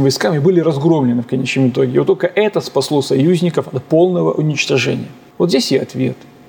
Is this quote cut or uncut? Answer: uncut